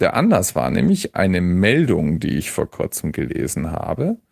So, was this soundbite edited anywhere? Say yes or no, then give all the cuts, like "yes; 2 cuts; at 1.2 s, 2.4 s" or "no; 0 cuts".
no; 0 cuts